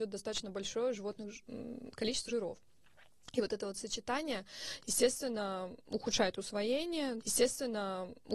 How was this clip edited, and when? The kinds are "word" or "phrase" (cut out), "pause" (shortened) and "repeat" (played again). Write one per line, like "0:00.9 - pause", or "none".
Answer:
0:02.3 - word
0:07.2 - repeat